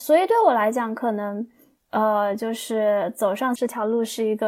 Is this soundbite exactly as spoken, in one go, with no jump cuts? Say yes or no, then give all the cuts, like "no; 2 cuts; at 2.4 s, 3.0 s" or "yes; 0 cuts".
no; 1 cut; at 3.6 s